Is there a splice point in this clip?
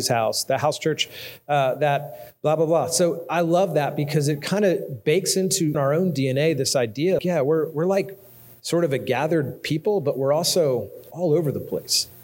yes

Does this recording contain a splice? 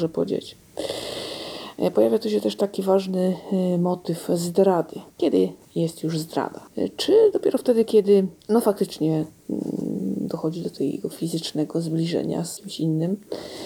yes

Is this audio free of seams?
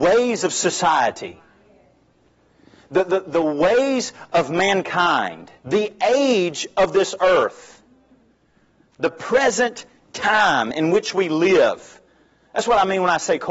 no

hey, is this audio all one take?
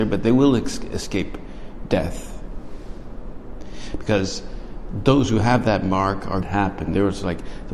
no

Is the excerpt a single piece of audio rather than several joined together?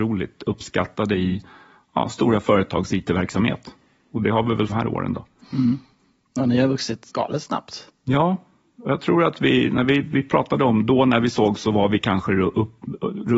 no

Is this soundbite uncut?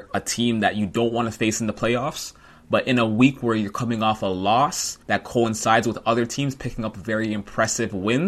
no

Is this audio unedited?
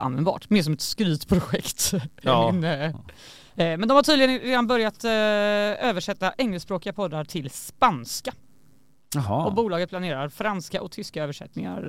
yes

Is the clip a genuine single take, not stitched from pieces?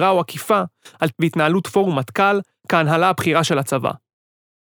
no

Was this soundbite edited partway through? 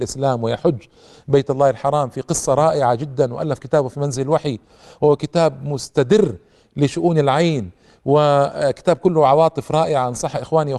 no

